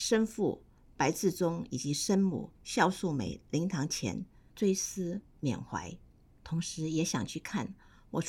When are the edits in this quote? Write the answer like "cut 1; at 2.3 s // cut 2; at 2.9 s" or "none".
cut 1; at 2.5 s